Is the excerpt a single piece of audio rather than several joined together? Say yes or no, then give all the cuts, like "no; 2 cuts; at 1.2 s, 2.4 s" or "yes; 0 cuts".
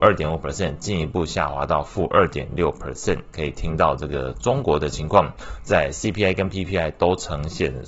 yes; 0 cuts